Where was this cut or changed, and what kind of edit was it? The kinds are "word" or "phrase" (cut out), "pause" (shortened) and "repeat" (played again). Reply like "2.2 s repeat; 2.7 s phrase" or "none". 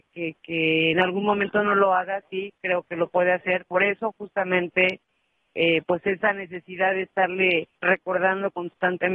7.7 s pause